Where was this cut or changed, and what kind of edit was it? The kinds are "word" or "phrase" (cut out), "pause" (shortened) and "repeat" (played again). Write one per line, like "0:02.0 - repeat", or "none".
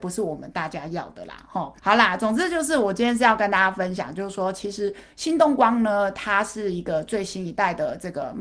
0:01.8 - pause